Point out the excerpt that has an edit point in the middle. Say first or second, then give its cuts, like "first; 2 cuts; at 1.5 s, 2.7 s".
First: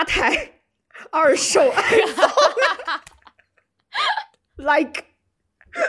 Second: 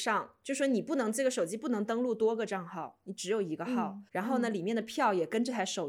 second; 1 cut; at 4.1 s